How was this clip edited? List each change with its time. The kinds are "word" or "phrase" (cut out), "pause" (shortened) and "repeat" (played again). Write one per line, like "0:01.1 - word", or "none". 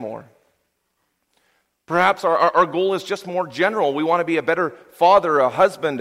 none